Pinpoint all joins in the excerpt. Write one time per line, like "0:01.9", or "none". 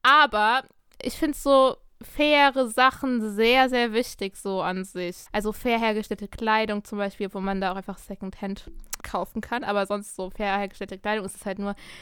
0:05.3
0:09.0